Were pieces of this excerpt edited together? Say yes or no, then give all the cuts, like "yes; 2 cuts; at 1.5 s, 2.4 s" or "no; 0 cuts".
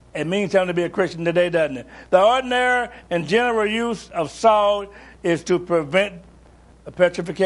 no; 0 cuts